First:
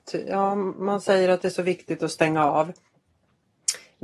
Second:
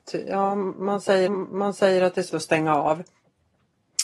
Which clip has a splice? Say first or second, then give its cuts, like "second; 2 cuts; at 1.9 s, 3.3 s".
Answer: second; 2 cuts; at 1.3 s, 2.3 s